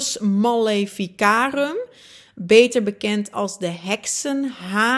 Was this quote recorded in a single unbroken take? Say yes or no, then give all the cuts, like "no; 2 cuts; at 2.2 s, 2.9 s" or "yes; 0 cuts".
yes; 0 cuts